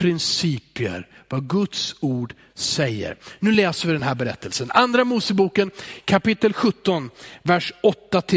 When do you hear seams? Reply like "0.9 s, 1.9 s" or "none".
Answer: none